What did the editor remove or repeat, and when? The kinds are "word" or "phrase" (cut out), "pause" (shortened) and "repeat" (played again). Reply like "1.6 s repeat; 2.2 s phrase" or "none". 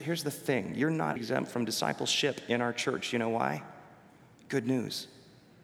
1.2 s word